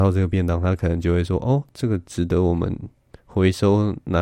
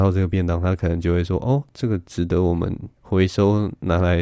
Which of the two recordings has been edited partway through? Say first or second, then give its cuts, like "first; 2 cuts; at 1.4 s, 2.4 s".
second; 1 cut; at 3.0 s